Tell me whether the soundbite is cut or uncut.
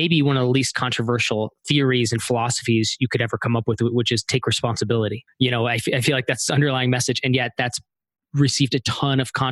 cut